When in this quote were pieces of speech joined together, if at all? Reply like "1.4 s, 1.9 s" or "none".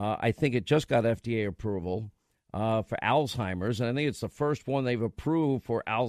none